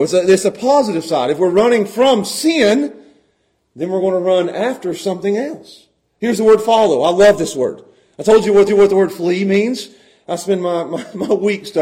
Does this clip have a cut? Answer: yes; 1 cut; at 8.7 s

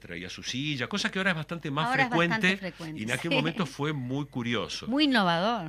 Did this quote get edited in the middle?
no; 0 cuts

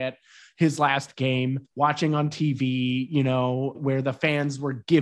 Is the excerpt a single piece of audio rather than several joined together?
no; 2 cuts; at 1.6 s, 3.7 s

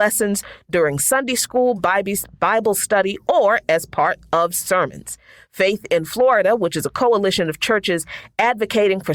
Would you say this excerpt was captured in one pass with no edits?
yes; 0 cuts

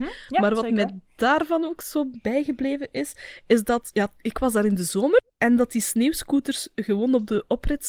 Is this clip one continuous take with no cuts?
no; 1 cut; at 5.3 s

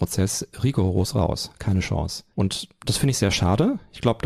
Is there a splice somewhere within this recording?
yes; 1 cut; at 2.3 s

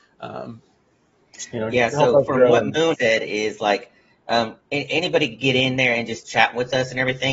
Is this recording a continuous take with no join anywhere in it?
no; 2 cuts; at 2.9 s, 4.6 s

